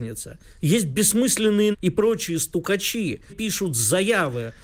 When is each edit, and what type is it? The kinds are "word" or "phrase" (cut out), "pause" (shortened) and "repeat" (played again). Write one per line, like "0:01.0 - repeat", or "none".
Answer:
0:01.7 - word
0:03.3 - word